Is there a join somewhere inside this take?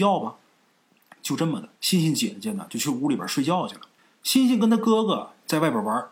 yes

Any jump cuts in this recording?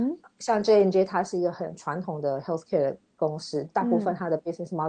no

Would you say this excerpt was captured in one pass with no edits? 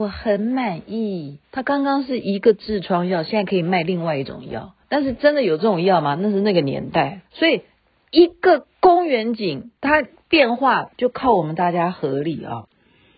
no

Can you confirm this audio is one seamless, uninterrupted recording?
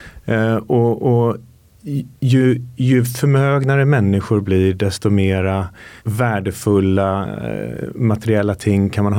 no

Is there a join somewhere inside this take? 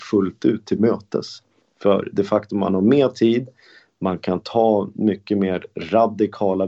no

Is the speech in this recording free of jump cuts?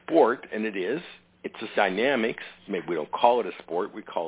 no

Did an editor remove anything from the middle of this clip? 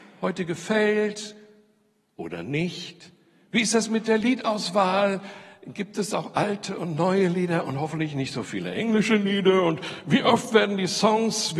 no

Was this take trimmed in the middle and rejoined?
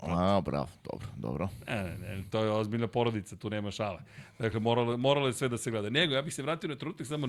no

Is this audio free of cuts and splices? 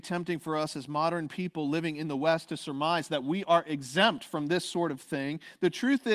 yes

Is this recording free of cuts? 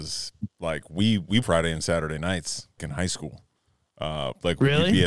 no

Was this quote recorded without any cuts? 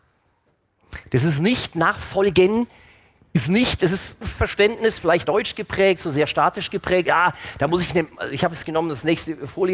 no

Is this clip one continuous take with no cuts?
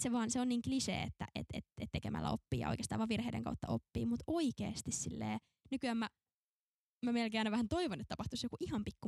yes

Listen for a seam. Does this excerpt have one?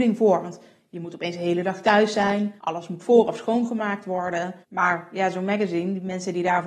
yes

